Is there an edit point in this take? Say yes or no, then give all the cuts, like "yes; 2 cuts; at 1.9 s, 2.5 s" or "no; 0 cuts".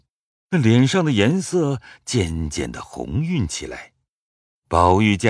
no; 0 cuts